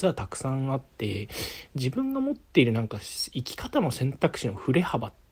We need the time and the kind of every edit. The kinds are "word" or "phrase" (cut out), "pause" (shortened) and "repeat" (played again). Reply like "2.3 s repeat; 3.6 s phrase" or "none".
0.9 s pause